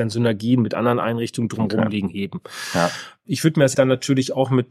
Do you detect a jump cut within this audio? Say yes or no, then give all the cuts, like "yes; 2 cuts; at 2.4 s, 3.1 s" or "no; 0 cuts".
yes; 1 cut; at 3.7 s